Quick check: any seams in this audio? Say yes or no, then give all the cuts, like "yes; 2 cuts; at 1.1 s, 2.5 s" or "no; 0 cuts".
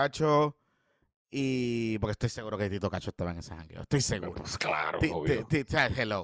no; 0 cuts